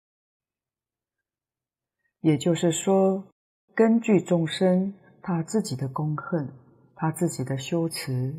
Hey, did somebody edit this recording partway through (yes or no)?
no